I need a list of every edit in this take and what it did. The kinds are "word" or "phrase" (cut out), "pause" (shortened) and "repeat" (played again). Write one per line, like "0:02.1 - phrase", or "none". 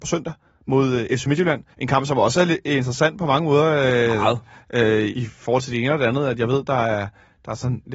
0:01.7 - pause
0:05.1 - word

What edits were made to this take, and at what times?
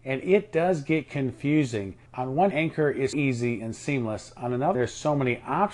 0:02.1 - pause
0:02.5 - word
0:03.1 - word
0:04.7 - word

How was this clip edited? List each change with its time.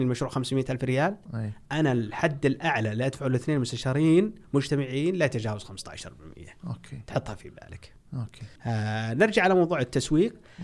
0:08.6 - pause

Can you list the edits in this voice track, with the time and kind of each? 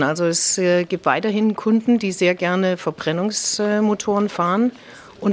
none

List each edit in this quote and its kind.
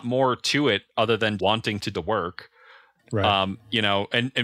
0:01.4 - word
0:01.9 - word

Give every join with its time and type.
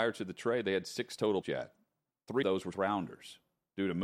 0:01.4 - word
0:02.4 - word
0:02.7 - word

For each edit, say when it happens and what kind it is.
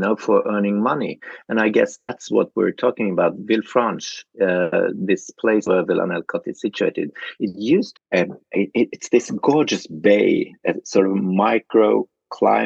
0:07.9 - phrase

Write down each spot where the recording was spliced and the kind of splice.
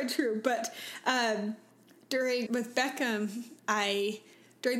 0:02.5 - word

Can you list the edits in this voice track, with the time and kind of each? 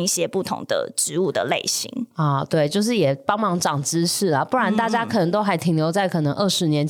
none

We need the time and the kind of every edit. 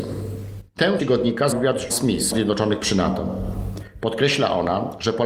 0:01.0 - word
0:01.5 - word
0:01.9 - word
0:02.3 - phrase

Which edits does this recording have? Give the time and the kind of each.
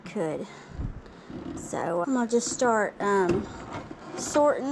0:02.0 - word

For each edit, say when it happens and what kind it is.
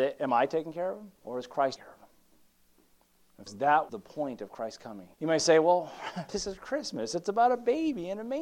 0:01.2 - pause
0:01.8 - word
0:03.5 - word
0:03.9 - word
0:05.1 - pause
0:06.3 - word

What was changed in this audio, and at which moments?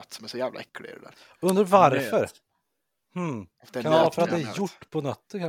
none

